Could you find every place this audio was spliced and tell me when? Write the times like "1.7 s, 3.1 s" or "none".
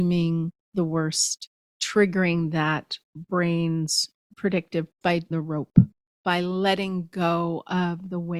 1.7 s, 4.9 s, 5.3 s